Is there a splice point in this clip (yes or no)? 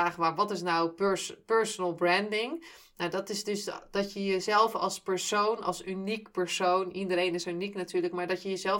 no